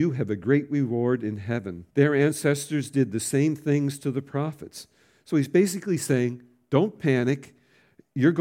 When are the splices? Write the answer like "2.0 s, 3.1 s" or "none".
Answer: 1.9 s